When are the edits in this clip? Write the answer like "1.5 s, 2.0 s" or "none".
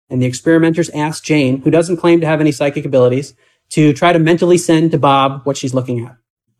none